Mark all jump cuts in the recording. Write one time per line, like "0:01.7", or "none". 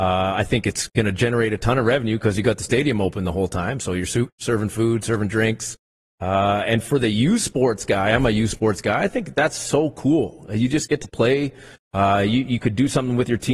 none